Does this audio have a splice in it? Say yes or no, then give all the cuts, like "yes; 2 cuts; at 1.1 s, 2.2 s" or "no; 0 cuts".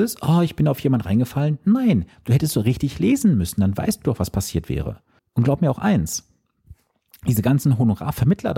yes; 1 cut; at 5.2 s